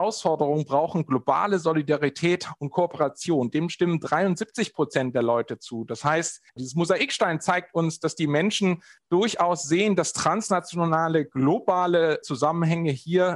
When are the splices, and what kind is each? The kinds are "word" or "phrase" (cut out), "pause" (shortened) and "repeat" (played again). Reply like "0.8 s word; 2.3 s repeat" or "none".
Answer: 6.5 s pause